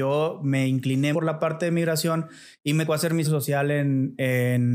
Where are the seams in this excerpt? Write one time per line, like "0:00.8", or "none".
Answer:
0:01.1
0:02.9
0:03.2